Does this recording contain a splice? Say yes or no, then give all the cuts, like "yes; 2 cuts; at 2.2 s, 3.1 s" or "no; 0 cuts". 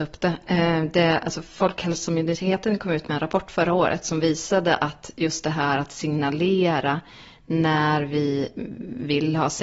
no; 0 cuts